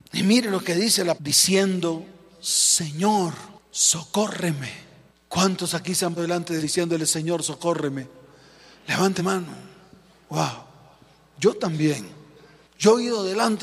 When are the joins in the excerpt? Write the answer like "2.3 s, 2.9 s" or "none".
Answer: 1.2 s, 6.2 s, 6.6 s, 9.2 s